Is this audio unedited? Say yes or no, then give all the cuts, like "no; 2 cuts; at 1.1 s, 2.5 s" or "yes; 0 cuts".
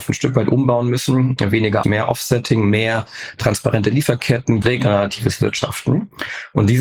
no; 2 cuts; at 1.8 s, 4.6 s